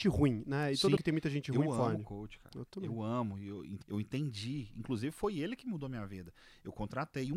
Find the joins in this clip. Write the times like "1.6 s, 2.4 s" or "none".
1.0 s, 3.8 s